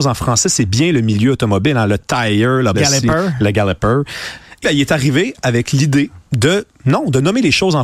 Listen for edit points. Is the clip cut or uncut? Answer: cut